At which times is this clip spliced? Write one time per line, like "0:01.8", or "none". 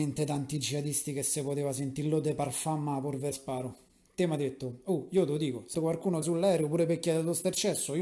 0:03.3
0:05.7
0:06.2